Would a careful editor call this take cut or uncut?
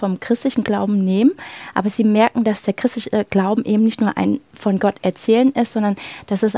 uncut